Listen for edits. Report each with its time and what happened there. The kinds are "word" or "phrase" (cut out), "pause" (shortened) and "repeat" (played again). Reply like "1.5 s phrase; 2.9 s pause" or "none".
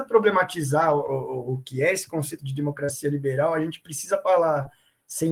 none